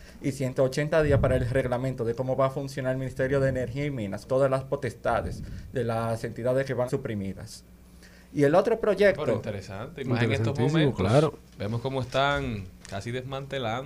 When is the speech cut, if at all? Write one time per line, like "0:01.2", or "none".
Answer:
0:04.2
0:06.9
0:11.5